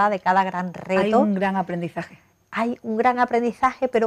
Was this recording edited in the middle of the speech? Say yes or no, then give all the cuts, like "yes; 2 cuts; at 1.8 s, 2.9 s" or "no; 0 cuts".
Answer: no; 0 cuts